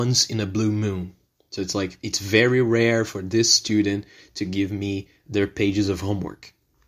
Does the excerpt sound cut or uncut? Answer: uncut